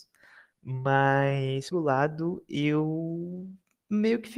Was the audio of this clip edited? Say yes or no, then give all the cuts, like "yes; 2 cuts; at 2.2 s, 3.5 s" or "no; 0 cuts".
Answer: yes; 1 cut; at 1.7 s